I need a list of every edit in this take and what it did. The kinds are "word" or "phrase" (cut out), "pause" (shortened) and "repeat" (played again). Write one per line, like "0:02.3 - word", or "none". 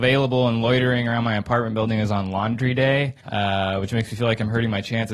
0:03.2 - pause